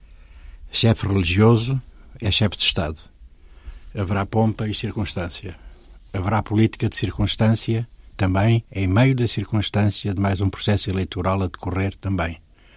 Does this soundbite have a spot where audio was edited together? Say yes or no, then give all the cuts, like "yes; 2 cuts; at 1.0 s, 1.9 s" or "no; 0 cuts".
no; 0 cuts